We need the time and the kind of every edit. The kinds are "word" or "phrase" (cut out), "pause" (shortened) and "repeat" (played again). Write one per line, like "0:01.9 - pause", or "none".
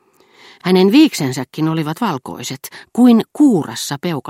none

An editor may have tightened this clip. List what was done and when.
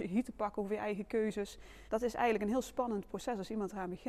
0:01.9 - pause

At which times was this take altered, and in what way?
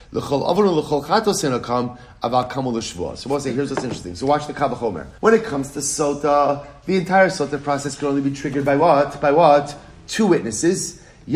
0:05.2 - pause

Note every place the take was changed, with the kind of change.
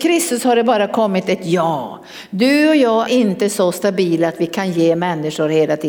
0:03.1 - word

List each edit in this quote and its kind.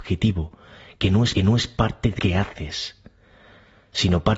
0:01.4 - repeat
0:02.2 - word

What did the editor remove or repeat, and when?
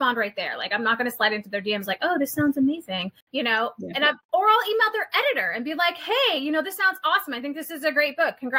0:03.2 - pause

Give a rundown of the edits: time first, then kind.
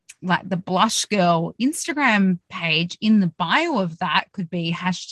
none

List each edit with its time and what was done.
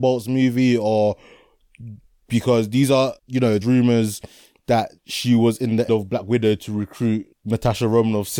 0:02.1 - pause
0:03.2 - pause
0:03.6 - word
0:05.0 - pause
0:05.9 - word
0:07.3 - word

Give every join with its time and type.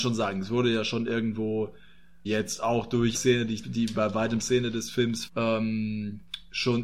0:02.3 - word
0:03.1 - word
0:03.6 - word
0:04.4 - word
0:05.3 - word

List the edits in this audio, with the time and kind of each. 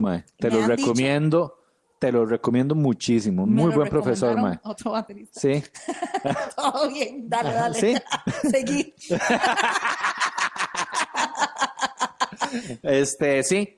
none

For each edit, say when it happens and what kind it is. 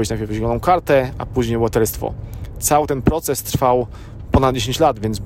none

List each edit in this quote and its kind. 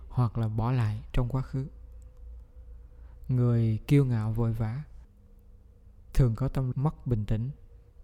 0:06.7 - word

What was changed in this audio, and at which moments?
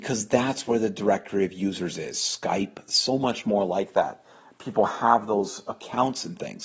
none

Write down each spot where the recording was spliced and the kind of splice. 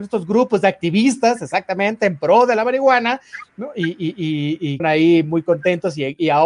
0:04.8 - phrase

